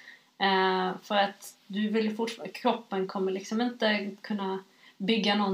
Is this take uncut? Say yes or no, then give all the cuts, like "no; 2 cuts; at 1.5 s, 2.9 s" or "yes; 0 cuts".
yes; 0 cuts